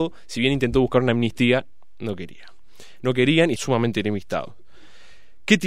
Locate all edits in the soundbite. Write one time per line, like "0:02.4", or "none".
0:03.6